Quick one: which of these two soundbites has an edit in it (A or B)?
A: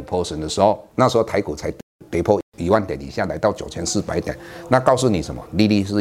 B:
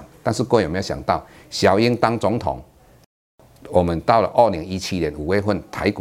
A